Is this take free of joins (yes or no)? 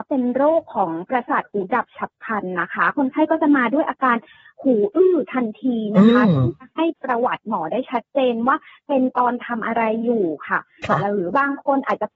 yes